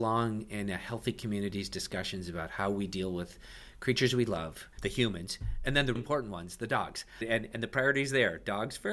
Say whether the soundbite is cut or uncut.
cut